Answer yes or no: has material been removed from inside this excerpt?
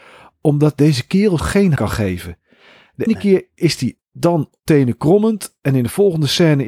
yes